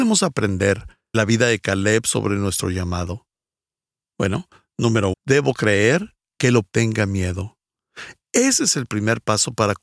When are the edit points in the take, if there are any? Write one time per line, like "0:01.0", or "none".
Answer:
0:01.1
0:05.1
0:06.6